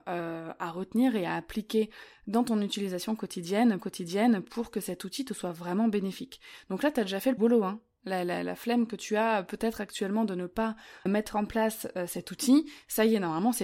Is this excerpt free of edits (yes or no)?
no